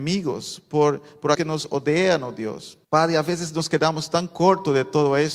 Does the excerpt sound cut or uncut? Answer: cut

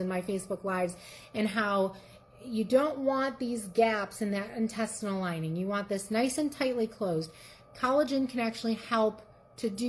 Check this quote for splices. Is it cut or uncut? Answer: uncut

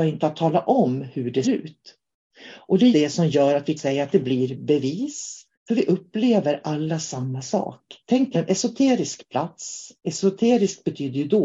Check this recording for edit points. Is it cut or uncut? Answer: cut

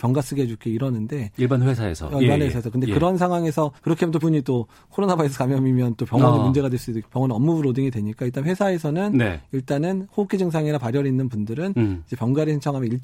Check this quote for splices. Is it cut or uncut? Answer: cut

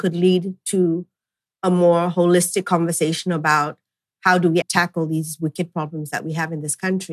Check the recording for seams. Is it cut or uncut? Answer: cut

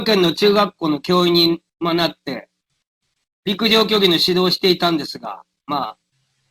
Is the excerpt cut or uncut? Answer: uncut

